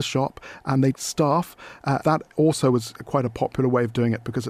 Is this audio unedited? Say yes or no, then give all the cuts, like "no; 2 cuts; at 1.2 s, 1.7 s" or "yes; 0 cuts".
no; 2 cuts; at 0.9 s, 2.0 s